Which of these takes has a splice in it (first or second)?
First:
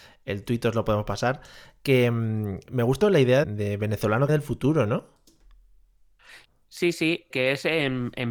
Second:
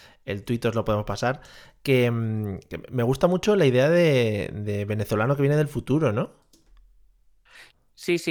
first